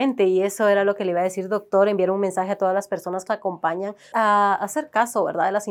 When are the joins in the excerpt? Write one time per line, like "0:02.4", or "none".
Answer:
0:03.3
0:04.1